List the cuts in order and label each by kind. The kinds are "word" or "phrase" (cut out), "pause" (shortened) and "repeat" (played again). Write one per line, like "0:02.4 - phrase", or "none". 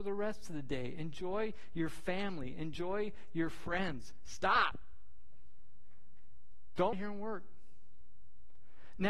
0:06.9 - phrase